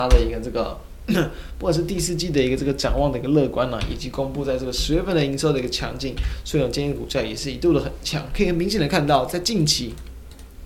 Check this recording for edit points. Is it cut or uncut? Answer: uncut